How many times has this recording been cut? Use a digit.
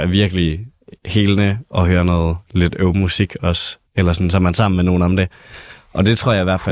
2